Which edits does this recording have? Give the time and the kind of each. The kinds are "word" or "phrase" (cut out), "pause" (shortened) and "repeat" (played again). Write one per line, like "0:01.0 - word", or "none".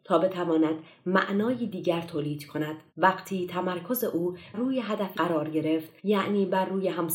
0:02.9 - pause
0:04.5 - word
0:05.1 - word
0:06.0 - pause